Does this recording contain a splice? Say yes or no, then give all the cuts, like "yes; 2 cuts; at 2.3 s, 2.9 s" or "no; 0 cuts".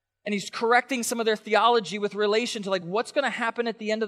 no; 0 cuts